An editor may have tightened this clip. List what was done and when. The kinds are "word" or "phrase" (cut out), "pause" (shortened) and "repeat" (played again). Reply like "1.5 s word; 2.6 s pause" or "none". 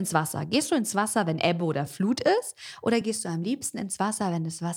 none